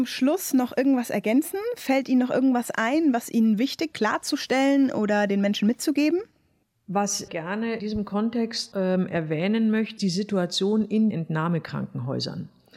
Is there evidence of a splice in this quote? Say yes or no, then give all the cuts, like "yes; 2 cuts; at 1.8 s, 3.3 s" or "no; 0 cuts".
yes; 6 cuts; at 3.9 s, 7.3 s, 7.8 s, 8.7 s, 10.0 s, 11.1 s